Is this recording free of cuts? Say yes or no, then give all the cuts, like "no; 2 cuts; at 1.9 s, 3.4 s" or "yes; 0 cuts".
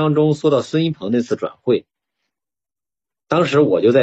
yes; 0 cuts